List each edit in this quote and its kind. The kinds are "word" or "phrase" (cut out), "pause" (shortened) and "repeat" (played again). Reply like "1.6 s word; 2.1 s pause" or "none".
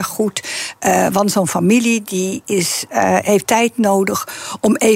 3.4 s word

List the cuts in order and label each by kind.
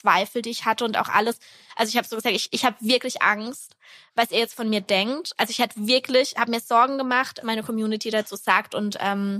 7.4 s word

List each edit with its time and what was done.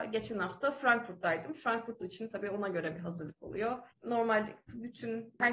2.0 s phrase; 3.9 s pause

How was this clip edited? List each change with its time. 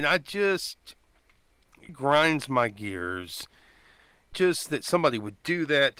1.9 s word; 4.3 s phrase

